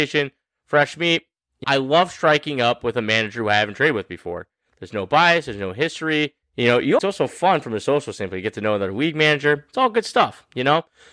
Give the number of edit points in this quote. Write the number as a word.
three